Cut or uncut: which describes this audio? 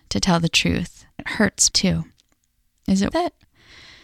cut